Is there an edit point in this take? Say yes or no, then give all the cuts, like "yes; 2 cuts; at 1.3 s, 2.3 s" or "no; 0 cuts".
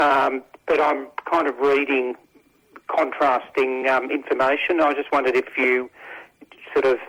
no; 0 cuts